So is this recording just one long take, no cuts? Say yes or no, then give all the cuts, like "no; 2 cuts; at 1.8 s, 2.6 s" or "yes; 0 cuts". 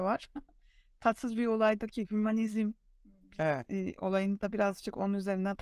yes; 0 cuts